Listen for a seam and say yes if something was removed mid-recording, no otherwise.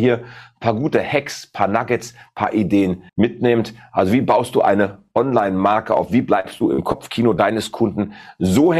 yes